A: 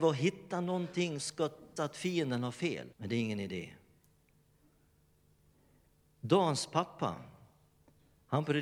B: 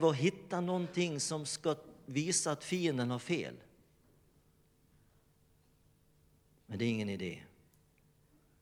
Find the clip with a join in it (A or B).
A